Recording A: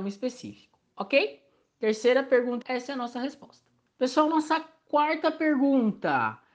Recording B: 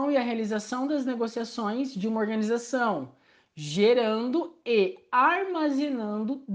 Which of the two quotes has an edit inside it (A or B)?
A